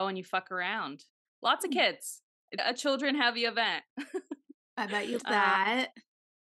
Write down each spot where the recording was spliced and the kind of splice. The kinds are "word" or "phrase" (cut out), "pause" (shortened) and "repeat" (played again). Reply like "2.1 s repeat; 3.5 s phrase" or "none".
2.6 s word; 5.2 s word